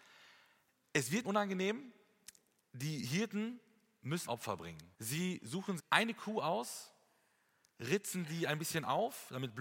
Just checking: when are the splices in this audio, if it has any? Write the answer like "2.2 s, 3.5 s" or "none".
1.2 s, 4.3 s, 4.9 s, 5.8 s